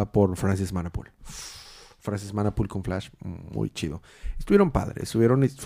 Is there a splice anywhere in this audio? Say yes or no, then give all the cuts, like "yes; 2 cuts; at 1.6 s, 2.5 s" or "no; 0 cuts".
no; 0 cuts